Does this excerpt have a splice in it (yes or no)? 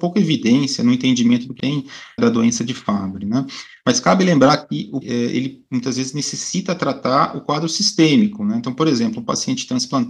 yes